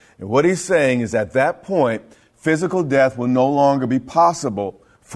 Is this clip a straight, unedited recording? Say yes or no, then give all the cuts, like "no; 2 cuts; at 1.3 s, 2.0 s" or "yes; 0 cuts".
yes; 0 cuts